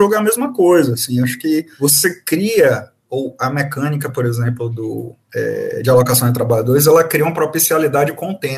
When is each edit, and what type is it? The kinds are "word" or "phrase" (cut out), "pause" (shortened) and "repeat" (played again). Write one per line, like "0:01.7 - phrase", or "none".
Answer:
none